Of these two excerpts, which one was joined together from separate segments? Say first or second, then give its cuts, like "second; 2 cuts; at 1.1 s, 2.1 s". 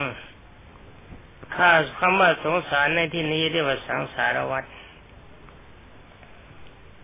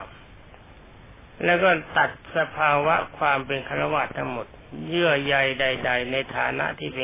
second; 1 cut; at 1.3 s